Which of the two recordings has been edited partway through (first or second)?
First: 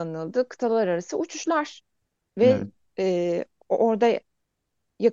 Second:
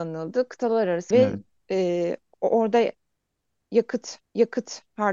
second